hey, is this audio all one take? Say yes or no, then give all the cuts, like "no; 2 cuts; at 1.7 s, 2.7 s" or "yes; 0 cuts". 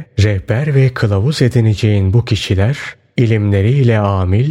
yes; 0 cuts